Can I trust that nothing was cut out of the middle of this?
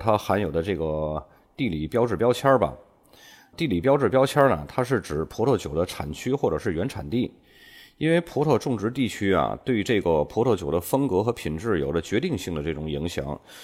yes; 0 cuts

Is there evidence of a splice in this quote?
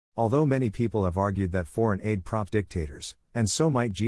yes; 1 cut; at 2.5 s

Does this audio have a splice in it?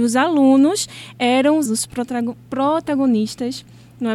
yes; 1 cut; at 1.7 s

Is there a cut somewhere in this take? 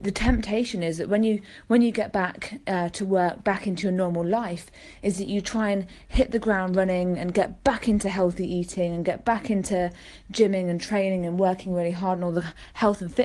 no; 0 cuts

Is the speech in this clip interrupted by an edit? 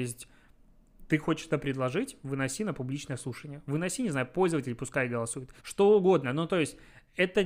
yes; 1 cut; at 5.6 s

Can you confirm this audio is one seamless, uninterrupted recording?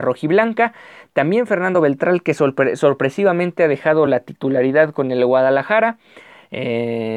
yes; 0 cuts

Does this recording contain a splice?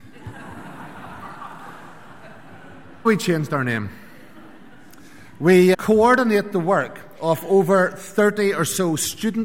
yes; 2 cuts; at 3.1 s, 5.7 s

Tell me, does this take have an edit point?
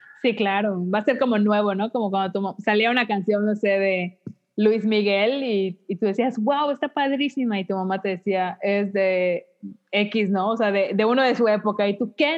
no; 0 cuts

